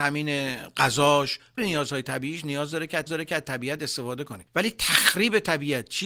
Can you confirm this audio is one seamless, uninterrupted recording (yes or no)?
no